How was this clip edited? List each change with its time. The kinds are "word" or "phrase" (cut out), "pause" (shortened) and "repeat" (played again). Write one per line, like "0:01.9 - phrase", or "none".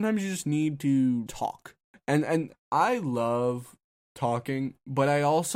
0:01.3 - word
0:01.8 - pause
0:02.5 - word